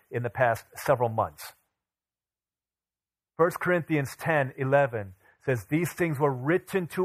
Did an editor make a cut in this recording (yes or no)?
no